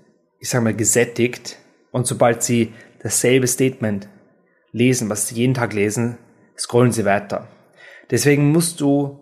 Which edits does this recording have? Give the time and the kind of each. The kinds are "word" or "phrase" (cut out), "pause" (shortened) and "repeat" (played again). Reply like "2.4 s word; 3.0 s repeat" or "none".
none

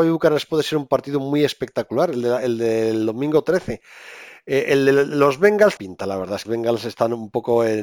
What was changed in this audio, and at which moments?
5.8 s phrase; 6.4 s phrase

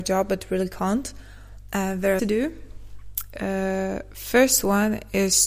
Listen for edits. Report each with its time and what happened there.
2.2 s phrase

